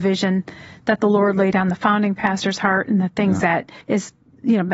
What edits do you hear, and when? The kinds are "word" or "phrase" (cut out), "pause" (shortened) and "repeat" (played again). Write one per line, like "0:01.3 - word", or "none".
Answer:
0:03.8 - pause